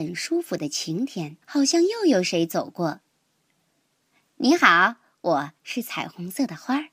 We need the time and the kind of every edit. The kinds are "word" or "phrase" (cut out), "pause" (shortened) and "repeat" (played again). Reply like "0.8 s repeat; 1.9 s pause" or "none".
1.4 s pause